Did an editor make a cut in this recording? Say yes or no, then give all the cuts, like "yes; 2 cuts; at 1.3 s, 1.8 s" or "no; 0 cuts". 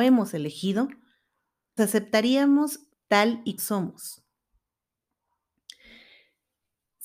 yes; 3 cuts; at 1.8 s, 2.9 s, 3.6 s